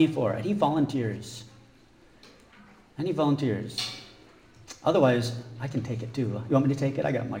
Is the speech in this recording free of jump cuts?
yes; 0 cuts

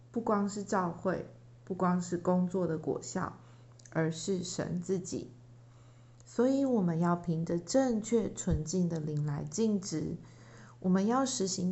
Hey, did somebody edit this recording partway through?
no; 0 cuts

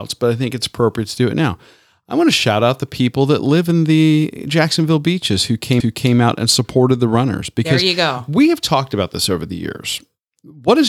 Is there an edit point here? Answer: yes; 1 cut; at 5.8 s

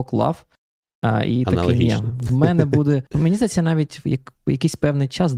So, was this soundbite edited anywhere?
yes; 1 cut; at 3.1 s

